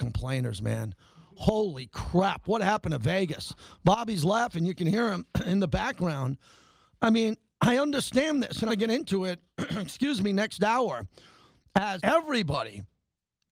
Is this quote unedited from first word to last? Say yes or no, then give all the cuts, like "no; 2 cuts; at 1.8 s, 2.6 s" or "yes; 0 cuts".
no; 2 cuts; at 8.7 s, 12.0 s